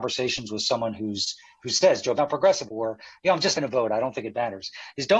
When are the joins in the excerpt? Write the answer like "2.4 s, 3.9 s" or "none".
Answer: 1.6 s, 2.2 s, 2.7 s, 3.5 s